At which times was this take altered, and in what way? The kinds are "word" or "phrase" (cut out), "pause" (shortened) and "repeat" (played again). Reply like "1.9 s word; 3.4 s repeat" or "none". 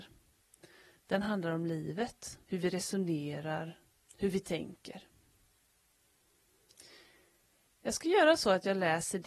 2.4 s pause